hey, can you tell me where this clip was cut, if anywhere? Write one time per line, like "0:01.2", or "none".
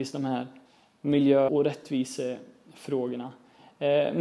0:01.5